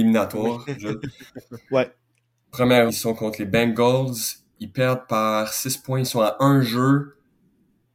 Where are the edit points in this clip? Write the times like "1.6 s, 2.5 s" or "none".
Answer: 2.9 s